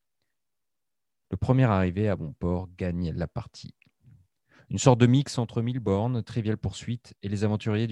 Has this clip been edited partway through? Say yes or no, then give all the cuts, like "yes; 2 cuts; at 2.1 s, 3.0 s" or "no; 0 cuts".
no; 0 cuts